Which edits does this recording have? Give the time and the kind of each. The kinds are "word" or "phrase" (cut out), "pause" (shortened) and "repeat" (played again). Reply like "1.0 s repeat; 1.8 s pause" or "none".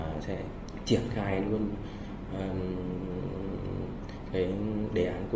none